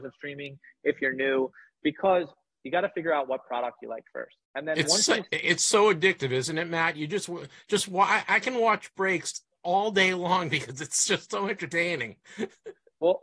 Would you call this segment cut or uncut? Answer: cut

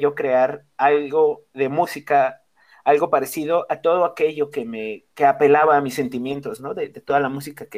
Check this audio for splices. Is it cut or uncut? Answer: uncut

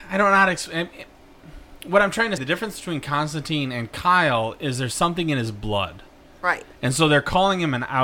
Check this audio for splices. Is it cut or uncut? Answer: cut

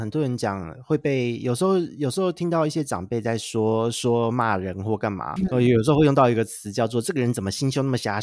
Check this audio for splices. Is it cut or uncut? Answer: cut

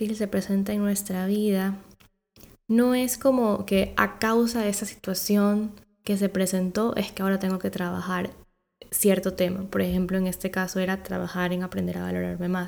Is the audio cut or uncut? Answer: uncut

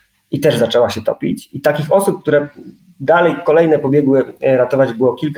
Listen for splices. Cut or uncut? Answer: uncut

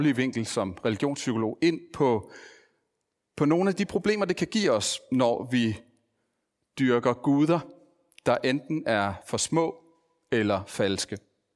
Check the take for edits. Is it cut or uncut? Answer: uncut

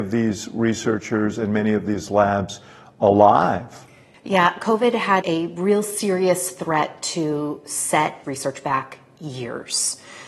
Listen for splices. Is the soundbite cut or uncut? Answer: cut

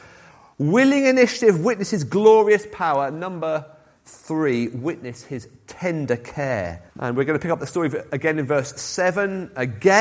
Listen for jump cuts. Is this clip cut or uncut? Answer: cut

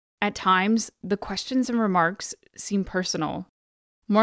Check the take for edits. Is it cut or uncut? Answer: uncut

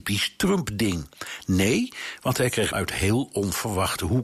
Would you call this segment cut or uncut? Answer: cut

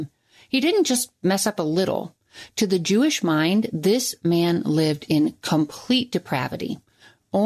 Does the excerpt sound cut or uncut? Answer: uncut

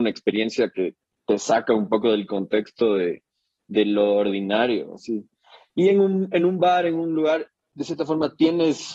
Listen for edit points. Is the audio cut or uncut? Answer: uncut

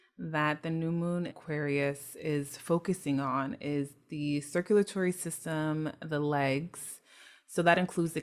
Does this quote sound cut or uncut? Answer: cut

